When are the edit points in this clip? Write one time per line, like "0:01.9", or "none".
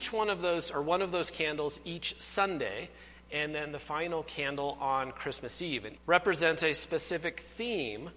0:06.0